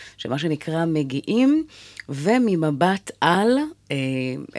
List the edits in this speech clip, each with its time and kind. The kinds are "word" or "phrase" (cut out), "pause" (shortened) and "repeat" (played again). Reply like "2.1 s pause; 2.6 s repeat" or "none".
none